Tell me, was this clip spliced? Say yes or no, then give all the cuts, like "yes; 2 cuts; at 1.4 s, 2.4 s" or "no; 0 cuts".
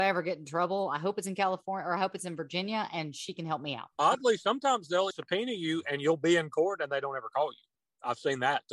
yes; 1 cut; at 5.1 s